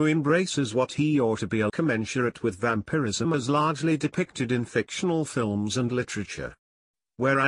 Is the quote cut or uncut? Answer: cut